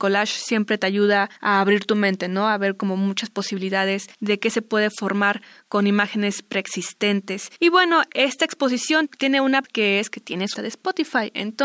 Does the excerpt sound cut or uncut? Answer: cut